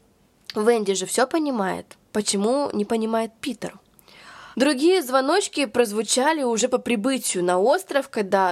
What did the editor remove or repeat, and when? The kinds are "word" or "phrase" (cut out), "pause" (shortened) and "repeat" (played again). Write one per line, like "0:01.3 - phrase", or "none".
0:02.1 - pause
0:04.5 - pause

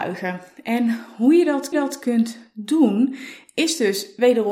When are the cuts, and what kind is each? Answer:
0:01.7 - repeat

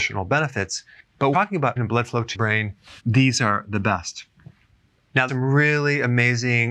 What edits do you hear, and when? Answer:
0:01.3 - word
0:01.8 - word
0:02.3 - word
0:03.0 - word
0:05.3 - word

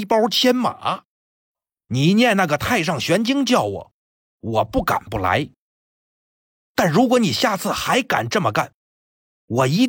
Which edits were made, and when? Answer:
none

